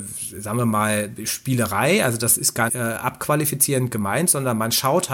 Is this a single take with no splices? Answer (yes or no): no